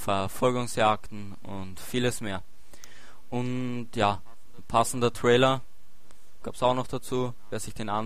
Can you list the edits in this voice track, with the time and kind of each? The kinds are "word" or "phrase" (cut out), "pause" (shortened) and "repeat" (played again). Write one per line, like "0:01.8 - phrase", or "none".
0:06.4 - word

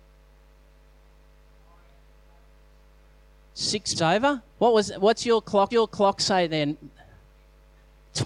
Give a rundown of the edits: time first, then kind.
0:03.9 - word
0:04.5 - pause
0:05.7 - repeat

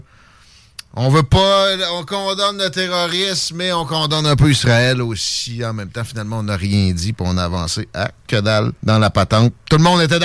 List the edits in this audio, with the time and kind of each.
0:08.8 - pause

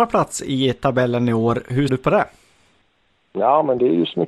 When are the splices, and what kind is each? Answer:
0:01.9 - word

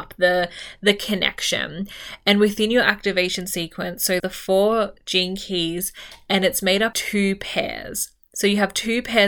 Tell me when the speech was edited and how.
0:04.2 - word
0:06.9 - word

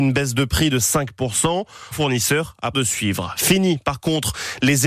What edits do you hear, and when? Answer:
0:01.9 - word
0:02.7 - word

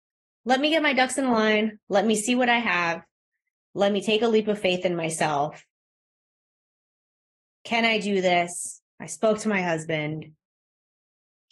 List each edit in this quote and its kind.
0:08.9 - pause

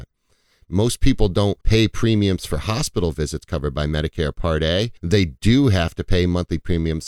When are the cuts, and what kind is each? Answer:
0:01.6 - pause
0:05.0 - pause

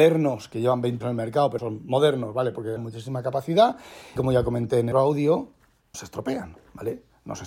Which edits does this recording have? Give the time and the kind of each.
0:01.0 - word
0:01.6 - word
0:02.8 - word
0:04.2 - word
0:04.9 - word
0:05.9 - word

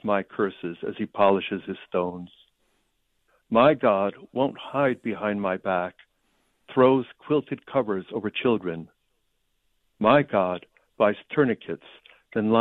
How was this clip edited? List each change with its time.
none

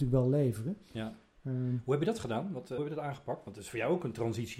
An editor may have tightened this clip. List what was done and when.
0:02.8 - word

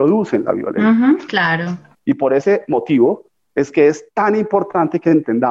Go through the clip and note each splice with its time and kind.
none

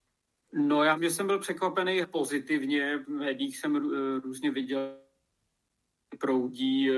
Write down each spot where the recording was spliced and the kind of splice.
0:01.0 - word
0:02.0 - word
0:03.0 - phrase

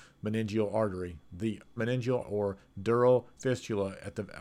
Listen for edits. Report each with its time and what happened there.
0:01.8 - word
0:02.2 - word
0:03.4 - word

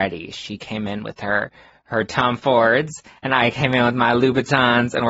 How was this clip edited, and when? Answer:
none

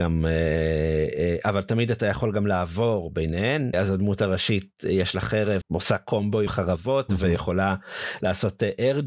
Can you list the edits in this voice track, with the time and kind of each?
0:03.7 - word
0:05.6 - phrase
0:06.5 - phrase

